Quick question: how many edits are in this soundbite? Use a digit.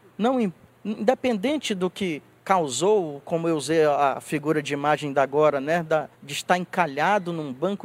1